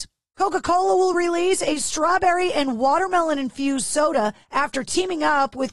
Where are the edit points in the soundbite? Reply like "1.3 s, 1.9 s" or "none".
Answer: none